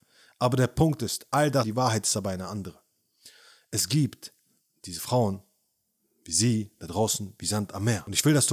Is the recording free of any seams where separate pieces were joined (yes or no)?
no